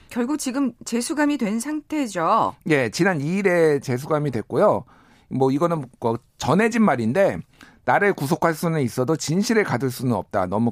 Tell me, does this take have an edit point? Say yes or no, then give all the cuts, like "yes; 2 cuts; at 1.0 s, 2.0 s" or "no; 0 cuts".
no; 0 cuts